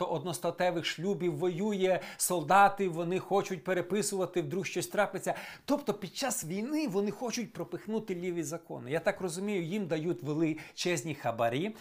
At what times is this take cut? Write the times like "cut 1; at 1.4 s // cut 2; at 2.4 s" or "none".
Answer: none